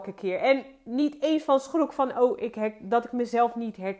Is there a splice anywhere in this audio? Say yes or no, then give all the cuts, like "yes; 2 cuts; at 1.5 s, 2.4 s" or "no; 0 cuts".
no; 0 cuts